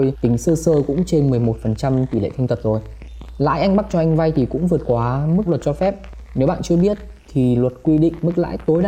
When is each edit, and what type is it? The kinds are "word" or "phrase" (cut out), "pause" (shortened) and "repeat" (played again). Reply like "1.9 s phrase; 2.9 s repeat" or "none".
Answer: 5.5 s phrase